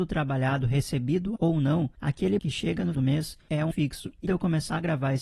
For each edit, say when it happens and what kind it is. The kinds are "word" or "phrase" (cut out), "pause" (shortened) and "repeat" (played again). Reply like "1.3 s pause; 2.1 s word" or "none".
1.4 s word; 2.4 s word; 2.9 s word; 3.7 s word; 4.3 s word